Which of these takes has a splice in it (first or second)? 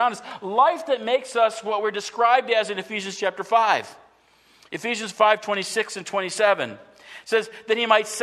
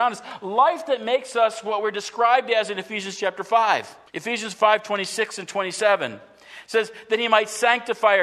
second